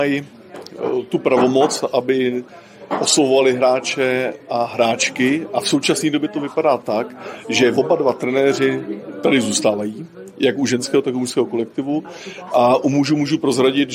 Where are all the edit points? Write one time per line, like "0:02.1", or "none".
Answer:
none